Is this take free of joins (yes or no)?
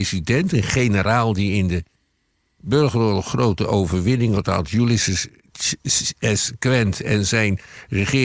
no